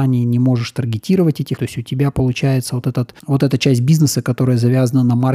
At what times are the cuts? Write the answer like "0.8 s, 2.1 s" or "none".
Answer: 1.6 s, 3.2 s